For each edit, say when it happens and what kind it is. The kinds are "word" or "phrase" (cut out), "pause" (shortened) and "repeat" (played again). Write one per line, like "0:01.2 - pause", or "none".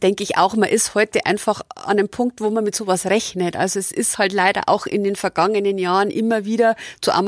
none